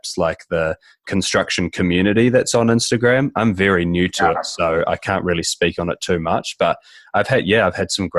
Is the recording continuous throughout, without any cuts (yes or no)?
yes